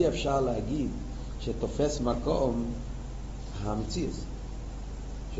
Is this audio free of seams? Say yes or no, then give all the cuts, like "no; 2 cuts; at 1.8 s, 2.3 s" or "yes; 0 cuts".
yes; 0 cuts